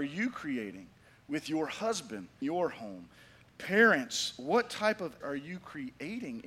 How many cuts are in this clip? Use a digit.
2